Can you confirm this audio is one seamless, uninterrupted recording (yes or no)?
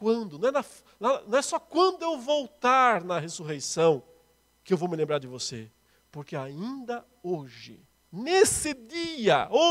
yes